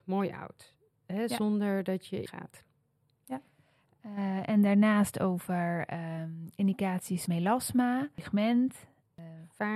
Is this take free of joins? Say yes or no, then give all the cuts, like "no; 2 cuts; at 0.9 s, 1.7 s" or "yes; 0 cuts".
no; 2 cuts; at 2.3 s, 7.3 s